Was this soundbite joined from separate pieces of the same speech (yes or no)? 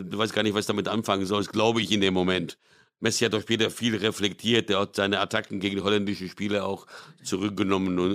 no